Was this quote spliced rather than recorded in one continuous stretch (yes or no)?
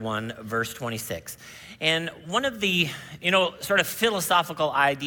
no